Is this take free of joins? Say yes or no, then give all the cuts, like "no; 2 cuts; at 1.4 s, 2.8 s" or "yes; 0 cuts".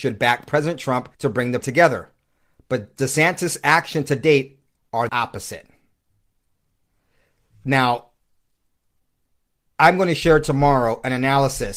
no; 3 cuts; at 1.1 s, 1.6 s, 5.1 s